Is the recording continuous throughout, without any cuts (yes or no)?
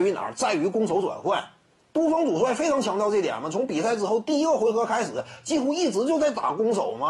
yes